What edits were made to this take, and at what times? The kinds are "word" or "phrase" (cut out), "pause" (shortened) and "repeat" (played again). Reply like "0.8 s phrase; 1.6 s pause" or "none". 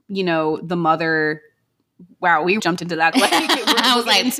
2.6 s word; 3.1 s phrase